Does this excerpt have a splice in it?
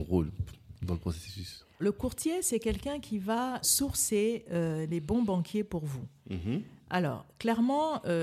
yes; 2 cuts; at 1.8 s, 3.6 s

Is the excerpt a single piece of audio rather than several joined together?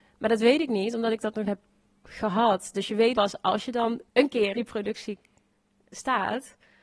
no; 4 cuts; at 1.4 s, 3.1 s, 4.1 s, 4.5 s

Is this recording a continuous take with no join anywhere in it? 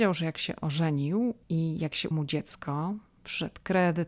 no; 2 cuts; at 1.4 s, 2.1 s

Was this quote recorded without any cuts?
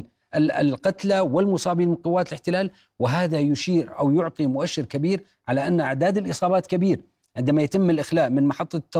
yes; 0 cuts

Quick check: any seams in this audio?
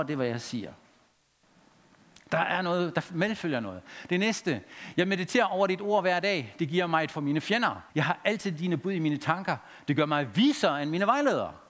yes; 2 cuts; at 7.1 s, 7.9 s

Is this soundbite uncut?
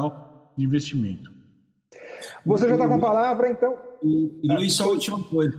yes; 0 cuts

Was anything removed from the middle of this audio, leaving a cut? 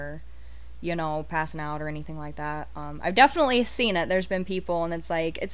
no; 0 cuts

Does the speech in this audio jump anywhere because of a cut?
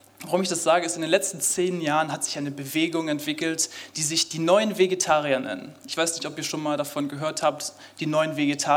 no; 0 cuts

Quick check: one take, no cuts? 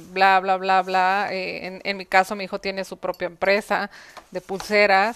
yes; 0 cuts

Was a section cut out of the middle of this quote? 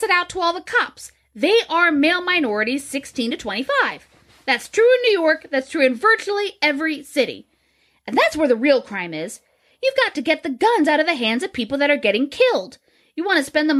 no; 0 cuts

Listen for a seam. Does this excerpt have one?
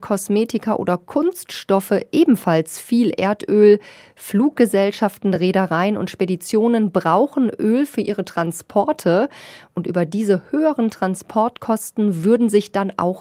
no; 0 cuts

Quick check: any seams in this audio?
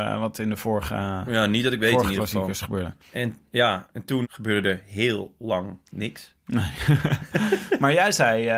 yes; 3 cuts; at 3.0 s, 4.2 s, 5.8 s

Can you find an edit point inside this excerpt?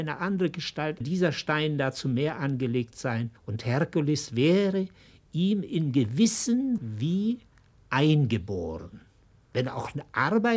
yes; 3 cuts; at 1.0 s, 3.4 s, 6.8 s

